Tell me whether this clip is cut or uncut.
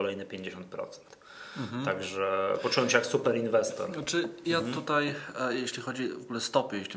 uncut